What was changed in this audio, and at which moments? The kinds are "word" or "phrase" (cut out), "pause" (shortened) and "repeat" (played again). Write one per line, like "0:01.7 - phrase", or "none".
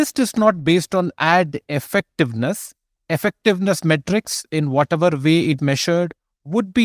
0:05.6 - word